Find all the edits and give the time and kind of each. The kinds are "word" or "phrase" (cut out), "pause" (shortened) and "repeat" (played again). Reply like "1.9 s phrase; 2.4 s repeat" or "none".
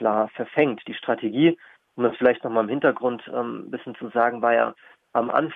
none